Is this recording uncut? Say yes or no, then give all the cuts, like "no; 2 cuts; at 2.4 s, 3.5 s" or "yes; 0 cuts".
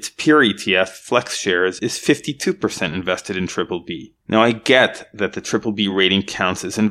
yes; 0 cuts